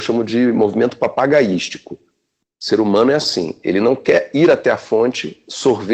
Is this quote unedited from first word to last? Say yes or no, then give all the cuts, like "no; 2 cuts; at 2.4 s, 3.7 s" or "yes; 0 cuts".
yes; 0 cuts